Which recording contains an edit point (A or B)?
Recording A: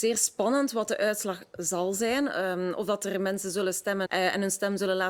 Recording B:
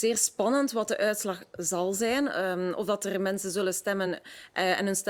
A